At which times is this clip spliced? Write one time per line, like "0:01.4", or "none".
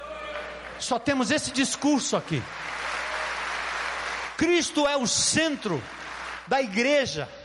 none